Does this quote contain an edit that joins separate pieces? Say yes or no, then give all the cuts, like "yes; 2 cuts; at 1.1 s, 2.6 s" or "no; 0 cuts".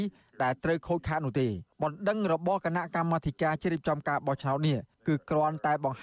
yes; 2 cuts; at 1.7 s, 4.9 s